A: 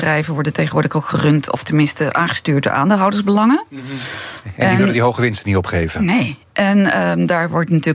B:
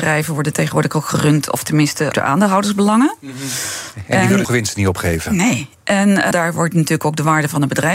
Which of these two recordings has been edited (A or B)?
B